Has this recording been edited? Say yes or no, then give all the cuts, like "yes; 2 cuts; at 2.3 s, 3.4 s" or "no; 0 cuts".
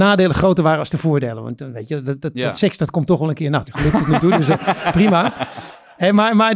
yes; 1 cut; at 3.7 s